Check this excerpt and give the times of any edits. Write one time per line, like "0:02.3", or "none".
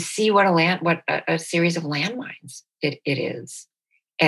none